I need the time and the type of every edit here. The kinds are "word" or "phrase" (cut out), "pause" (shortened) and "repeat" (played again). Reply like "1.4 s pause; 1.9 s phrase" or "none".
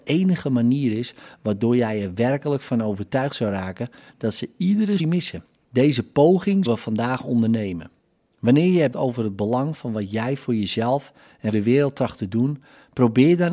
5.0 s word; 6.7 s word; 8.9 s word; 11.5 s word